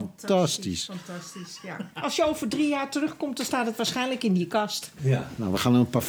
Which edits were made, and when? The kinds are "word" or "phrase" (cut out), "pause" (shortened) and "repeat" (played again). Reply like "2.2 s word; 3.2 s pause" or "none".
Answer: none

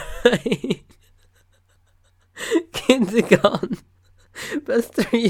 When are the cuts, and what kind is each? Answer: none

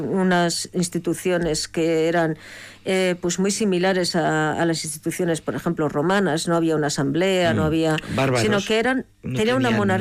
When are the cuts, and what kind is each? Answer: none

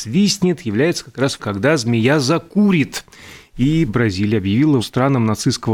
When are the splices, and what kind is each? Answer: 1.4 s word; 3.9 s word; 4.8 s word

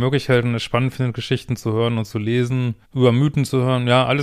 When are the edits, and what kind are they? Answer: 2.8 s pause

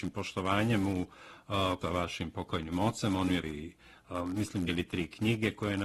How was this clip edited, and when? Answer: 1.8 s phrase; 3.4 s word; 4.7 s word

